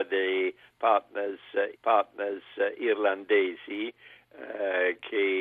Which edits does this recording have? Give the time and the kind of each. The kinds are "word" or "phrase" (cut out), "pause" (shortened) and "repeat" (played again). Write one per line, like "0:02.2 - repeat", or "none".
0:01.7 - repeat